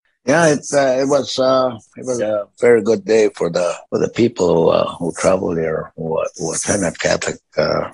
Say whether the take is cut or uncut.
cut